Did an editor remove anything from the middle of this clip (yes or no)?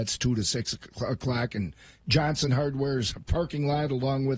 no